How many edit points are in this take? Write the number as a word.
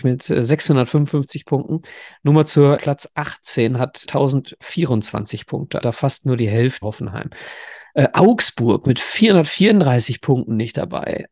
four